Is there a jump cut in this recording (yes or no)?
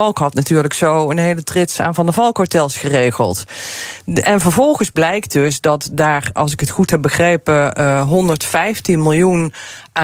no